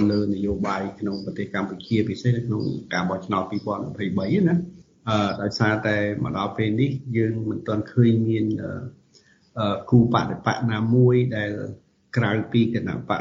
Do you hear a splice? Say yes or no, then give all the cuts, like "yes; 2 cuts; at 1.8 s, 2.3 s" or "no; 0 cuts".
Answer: no; 0 cuts